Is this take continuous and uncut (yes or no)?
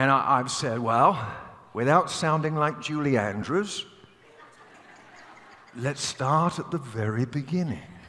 yes